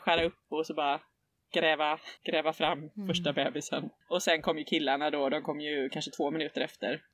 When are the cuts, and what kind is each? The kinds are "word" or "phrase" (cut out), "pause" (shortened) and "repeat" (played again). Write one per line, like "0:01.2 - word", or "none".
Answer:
0:02.2 - pause

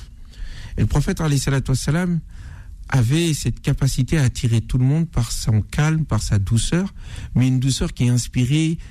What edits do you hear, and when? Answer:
none

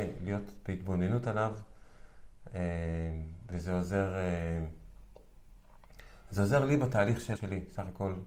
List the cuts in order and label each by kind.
0:07.3 - word

